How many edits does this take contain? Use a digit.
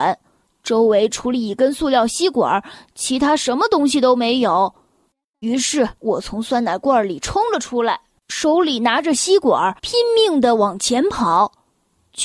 2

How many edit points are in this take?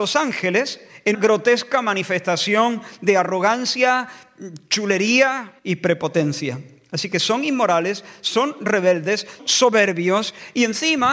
3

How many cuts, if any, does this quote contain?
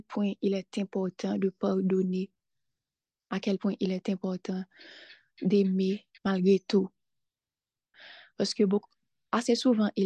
1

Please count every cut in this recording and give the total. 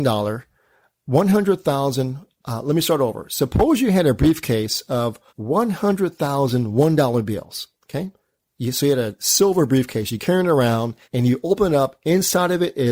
4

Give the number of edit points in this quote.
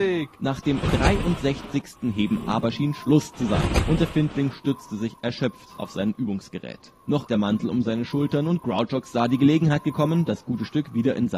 1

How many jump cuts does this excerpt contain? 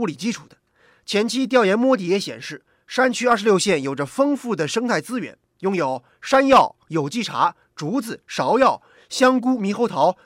0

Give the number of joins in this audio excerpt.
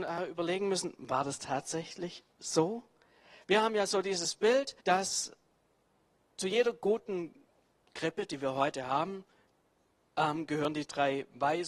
1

